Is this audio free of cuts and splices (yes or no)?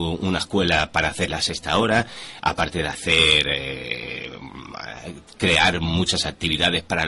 yes